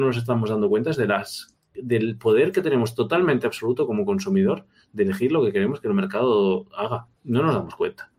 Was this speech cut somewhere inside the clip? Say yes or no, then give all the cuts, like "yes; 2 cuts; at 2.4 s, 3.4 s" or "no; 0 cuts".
yes; 1 cut; at 7.2 s